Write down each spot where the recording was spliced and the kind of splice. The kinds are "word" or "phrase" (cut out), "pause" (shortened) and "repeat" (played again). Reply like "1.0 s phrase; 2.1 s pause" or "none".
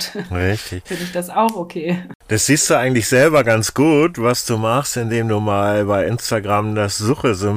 none